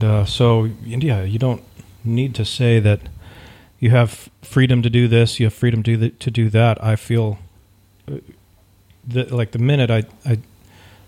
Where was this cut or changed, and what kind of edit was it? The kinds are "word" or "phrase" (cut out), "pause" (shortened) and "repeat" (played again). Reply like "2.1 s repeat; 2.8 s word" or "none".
none